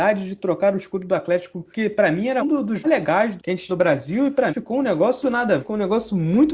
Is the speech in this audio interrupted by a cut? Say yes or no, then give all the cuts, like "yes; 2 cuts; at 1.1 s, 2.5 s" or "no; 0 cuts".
yes; 8 cuts; at 1.7 s, 2.4 s, 2.8 s, 3.4 s, 3.7 s, 4.5 s, 5.2 s, 5.6 s